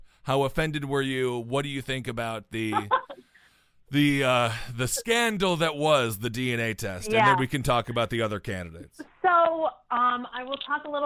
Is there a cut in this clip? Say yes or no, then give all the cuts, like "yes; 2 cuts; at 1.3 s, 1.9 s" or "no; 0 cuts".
no; 0 cuts